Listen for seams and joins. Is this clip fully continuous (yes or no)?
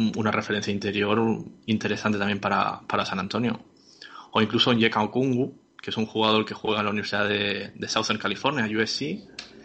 no